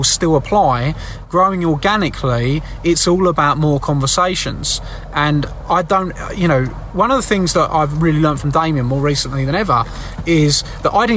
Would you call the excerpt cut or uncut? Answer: uncut